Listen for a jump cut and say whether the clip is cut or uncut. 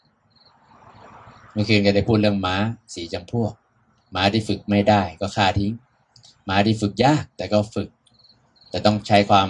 uncut